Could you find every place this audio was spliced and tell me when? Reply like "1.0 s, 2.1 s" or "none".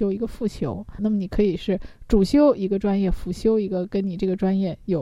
1.0 s